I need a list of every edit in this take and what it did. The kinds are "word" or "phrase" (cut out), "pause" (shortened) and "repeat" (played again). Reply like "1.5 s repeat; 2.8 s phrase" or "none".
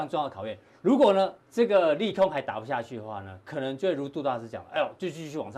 1.4 s pause